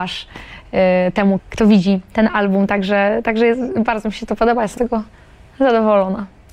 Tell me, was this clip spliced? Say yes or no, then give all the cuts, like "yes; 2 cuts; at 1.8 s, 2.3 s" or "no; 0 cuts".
yes; 2 cuts; at 1.4 s, 4.8 s